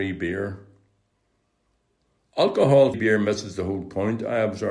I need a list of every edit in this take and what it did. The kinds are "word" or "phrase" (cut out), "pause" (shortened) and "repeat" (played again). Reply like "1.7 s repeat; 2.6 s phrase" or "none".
2.9 s word